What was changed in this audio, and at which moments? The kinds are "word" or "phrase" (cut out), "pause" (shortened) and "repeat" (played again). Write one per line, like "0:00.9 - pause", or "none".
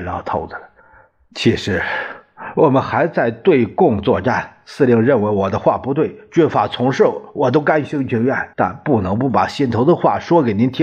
0:08.5 - pause

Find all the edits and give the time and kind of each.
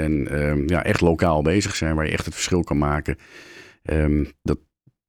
none

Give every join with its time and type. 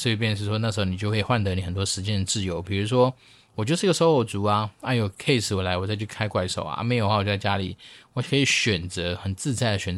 none

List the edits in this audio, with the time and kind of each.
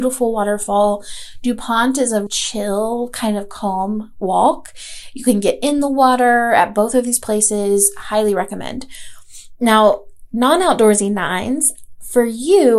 0:02.3 - word

